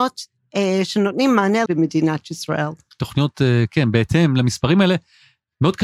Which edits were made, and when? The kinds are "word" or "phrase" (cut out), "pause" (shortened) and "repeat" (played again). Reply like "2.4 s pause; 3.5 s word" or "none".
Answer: 1.7 s phrase